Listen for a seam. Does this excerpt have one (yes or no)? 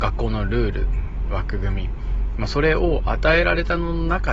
no